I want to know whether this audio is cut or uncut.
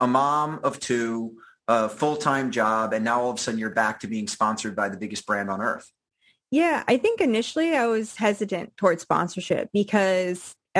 uncut